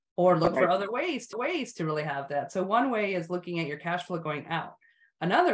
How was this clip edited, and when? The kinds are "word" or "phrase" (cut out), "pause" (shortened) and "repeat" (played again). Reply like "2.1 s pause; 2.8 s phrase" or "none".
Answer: 1.3 s repeat